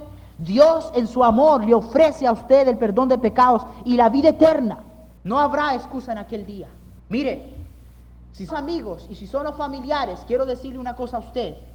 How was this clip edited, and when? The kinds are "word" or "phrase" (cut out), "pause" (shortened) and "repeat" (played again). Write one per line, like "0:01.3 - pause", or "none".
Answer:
0:05.2 - pause
0:07.0 - pause
0:08.5 - phrase

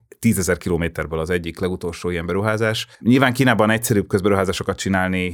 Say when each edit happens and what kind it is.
0:02.9 - pause

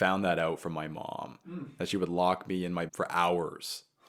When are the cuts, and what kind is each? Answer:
0:02.9 - word

